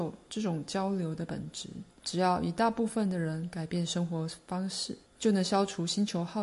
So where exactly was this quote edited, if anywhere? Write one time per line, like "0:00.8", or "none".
0:01.9
0:05.1